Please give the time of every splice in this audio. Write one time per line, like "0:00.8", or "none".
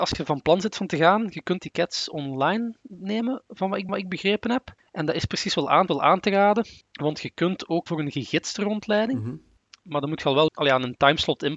0:01.6
0:03.9
0:04.8
0:05.9
0:06.8
0:07.9
0:10.5

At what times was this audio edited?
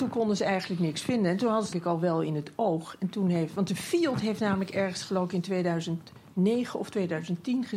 0:01.7

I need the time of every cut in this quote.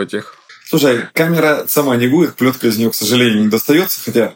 0:01.6

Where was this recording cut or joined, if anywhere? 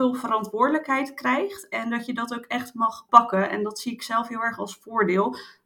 0:03.1

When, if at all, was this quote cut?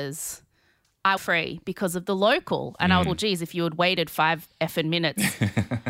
0:01.2
0:03.0

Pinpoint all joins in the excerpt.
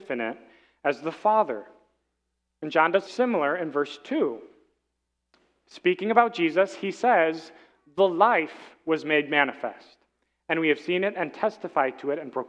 0:03.1

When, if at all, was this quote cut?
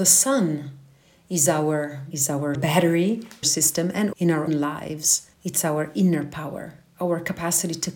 0:02.1
0:02.5
0:03.4
0:04.1
0:04.5
0:05.3

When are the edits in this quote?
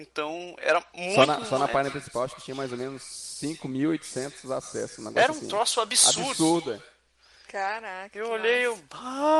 none

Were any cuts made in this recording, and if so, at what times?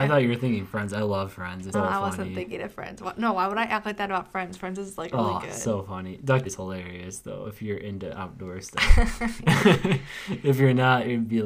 0:01.7
0:05.1
0:06.5

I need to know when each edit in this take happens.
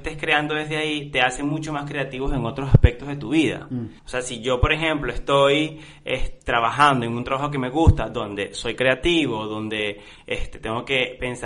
0:04.0

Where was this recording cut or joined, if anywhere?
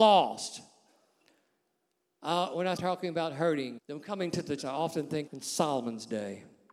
0:02.8
0:03.8
0:04.6
0:05.3

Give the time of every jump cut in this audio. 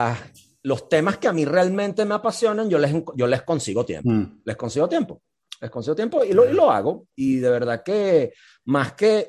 none

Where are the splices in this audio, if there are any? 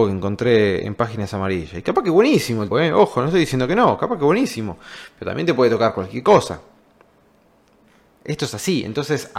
0:02.7

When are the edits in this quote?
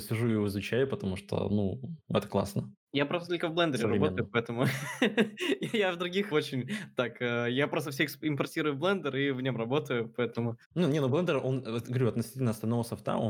0:02.0
0:06.3

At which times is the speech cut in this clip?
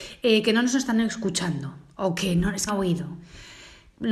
0:02.7

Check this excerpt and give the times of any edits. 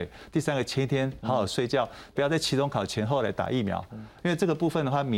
0:02.2

